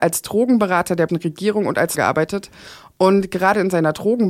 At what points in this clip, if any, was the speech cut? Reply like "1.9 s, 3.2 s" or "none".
1.1 s, 2.0 s